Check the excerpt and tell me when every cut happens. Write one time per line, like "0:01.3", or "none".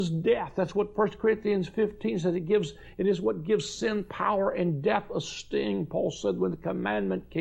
none